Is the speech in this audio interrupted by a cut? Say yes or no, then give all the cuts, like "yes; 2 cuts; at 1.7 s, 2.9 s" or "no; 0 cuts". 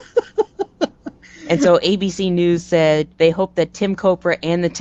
yes; 1 cut; at 3.1 s